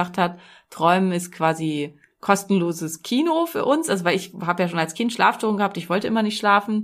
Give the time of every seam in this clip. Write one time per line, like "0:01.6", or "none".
none

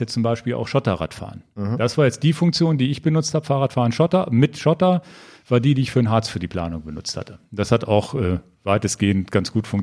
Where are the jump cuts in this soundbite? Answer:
none

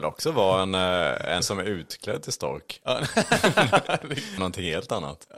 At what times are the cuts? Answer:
0:01.4
0:04.4

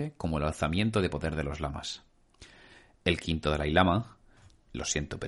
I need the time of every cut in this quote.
none

